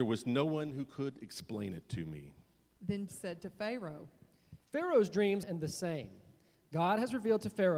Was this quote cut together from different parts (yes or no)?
yes